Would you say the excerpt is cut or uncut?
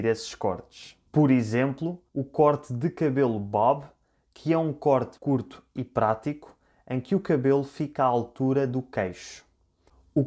cut